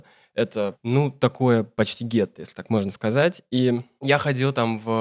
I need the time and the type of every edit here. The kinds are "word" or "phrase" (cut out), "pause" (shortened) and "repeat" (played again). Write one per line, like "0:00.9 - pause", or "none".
none